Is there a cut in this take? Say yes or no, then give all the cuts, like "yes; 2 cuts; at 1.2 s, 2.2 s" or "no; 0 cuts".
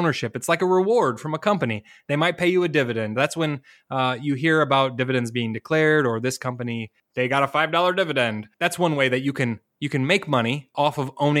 yes; 1 cut; at 8.5 s